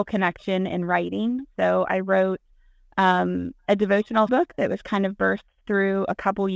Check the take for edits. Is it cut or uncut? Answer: cut